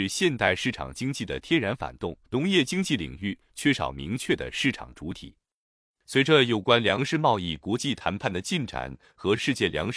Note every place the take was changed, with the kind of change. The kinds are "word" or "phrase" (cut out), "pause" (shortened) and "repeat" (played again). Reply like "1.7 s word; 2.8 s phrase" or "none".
2.2 s pause